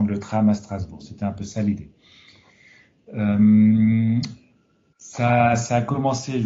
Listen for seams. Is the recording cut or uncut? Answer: uncut